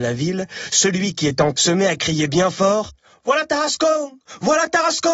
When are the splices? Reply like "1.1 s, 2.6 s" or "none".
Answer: 1.5 s